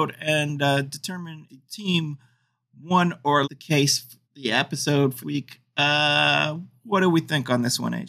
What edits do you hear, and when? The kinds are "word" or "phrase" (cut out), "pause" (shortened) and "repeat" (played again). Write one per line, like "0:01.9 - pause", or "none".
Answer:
0:01.5 - word
0:03.4 - word
0:04.2 - pause
0:05.2 - word